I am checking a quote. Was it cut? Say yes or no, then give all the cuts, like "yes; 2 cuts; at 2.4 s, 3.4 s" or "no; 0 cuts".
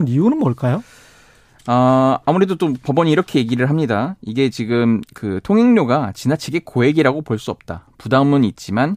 no; 0 cuts